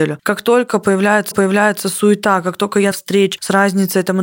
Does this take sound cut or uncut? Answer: cut